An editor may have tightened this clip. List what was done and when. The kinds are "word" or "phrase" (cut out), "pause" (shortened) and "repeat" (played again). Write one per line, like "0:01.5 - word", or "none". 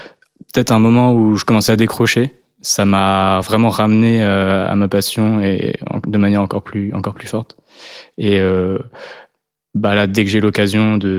none